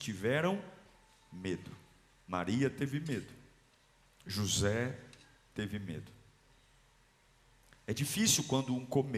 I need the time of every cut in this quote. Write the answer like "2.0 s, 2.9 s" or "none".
none